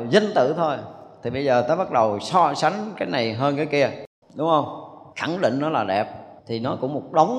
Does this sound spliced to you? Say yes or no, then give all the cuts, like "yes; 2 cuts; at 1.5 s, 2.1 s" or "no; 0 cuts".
yes; 3 cuts; at 4.2 s, 5.1 s, 6.4 s